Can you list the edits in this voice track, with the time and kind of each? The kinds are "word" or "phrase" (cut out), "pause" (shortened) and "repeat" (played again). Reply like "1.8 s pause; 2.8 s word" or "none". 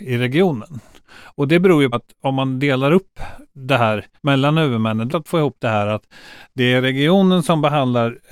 1.9 s word; 4.2 s pause; 5.1 s phrase